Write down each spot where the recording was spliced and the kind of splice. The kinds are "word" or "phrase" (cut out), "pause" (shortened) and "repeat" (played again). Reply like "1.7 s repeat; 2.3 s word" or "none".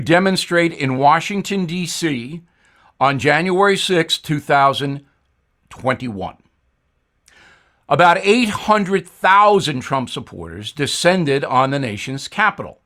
none